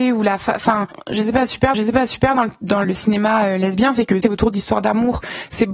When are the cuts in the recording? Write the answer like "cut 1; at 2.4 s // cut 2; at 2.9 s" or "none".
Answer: cut 1; at 1.7 s // cut 2; at 2.8 s // cut 3; at 4.2 s